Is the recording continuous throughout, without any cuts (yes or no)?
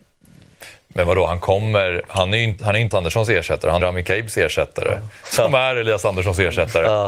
no